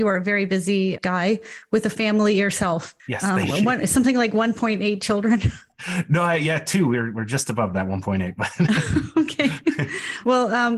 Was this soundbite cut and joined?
yes; 1 cut; at 3.0 s

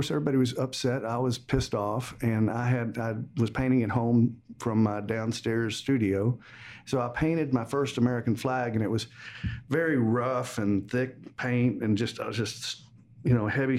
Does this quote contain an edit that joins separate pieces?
no; 0 cuts

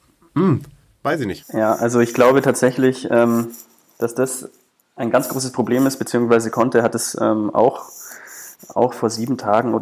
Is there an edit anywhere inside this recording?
no; 0 cuts

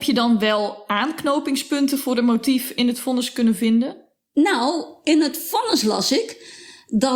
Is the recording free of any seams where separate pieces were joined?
yes; 0 cuts

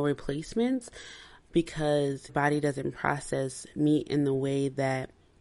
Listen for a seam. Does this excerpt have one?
yes; 1 cut; at 2.3 s

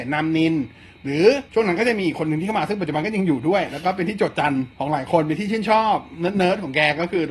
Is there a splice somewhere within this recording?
yes; 2 cuts; at 1.5 s, 4.7 s

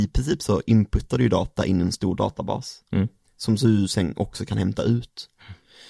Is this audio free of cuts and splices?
yes; 0 cuts

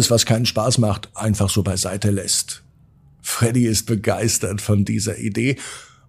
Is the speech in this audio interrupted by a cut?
no; 0 cuts

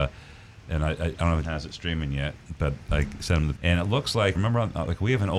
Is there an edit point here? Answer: yes; 3 cuts; at 1.4 s, 3.5 s, 4.3 s

